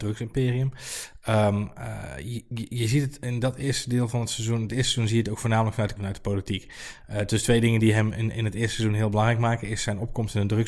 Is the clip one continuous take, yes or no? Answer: no